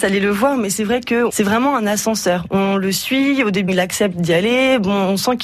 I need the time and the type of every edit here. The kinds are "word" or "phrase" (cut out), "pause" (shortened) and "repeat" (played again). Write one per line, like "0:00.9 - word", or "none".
0:01.3 - word
0:03.7 - word